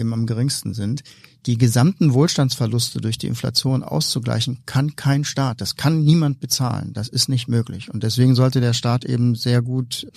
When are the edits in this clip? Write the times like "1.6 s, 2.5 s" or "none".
none